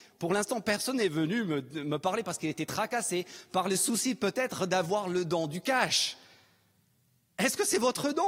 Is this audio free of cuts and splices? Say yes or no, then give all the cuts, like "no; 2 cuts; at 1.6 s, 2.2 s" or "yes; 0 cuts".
yes; 0 cuts